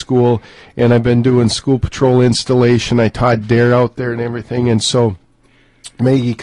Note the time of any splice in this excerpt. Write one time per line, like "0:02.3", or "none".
none

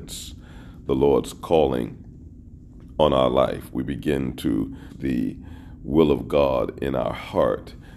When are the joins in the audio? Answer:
0:04.9

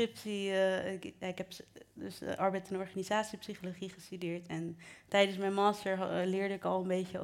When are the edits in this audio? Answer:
none

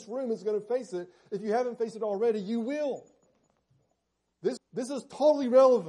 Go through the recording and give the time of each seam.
0:04.6

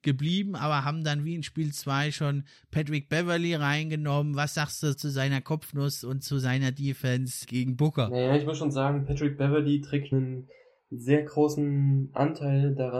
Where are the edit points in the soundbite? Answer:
0:04.9
0:07.4
0:10.1

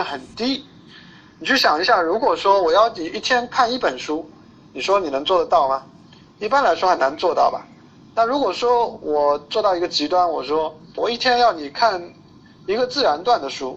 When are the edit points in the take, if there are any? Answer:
0:11.0

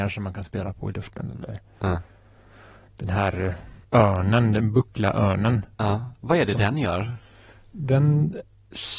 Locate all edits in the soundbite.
0:03.8

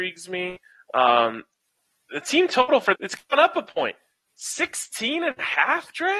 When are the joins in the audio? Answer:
0:02.9

